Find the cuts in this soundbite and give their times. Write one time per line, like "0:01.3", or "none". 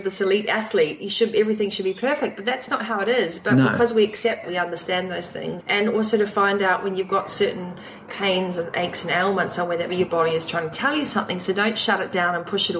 0:04.4
0:05.6
0:08.1
0:09.9